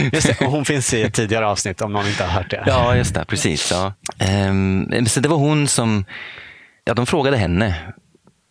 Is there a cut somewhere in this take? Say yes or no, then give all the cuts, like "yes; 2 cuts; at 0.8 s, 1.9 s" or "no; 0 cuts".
no; 0 cuts